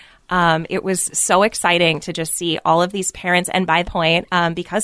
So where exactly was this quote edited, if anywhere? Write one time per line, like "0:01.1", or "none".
0:03.8